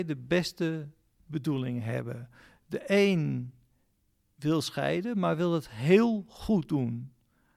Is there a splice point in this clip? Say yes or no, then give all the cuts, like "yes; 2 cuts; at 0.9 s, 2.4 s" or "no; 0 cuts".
no; 0 cuts